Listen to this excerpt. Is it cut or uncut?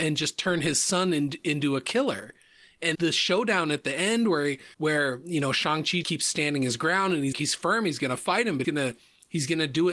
cut